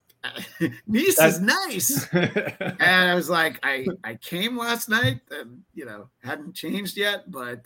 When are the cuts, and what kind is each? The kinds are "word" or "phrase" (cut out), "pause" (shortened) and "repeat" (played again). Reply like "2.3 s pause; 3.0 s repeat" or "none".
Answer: none